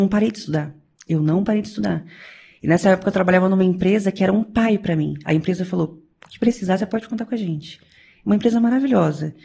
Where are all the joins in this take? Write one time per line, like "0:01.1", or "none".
none